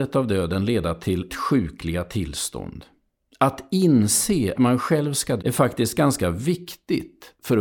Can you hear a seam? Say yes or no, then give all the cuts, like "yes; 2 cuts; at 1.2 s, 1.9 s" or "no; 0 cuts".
yes; 3 cuts; at 1.3 s, 4.5 s, 5.4 s